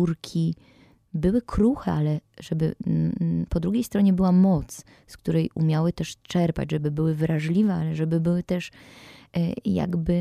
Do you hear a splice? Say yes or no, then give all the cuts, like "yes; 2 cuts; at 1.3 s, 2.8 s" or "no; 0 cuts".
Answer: no; 0 cuts